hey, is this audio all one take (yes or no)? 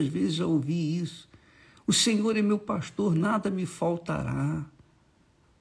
yes